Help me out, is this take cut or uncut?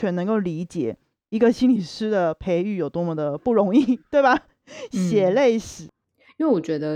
uncut